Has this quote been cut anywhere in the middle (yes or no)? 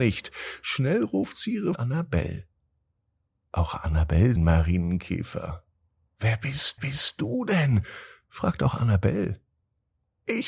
yes